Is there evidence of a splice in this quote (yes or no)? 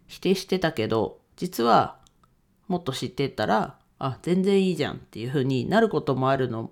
no